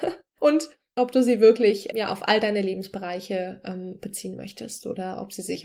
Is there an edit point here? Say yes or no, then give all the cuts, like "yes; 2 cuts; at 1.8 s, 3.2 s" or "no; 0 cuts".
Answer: yes; 1 cut; at 1.9 s